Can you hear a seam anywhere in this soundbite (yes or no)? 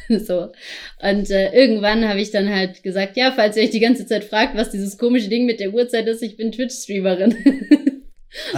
no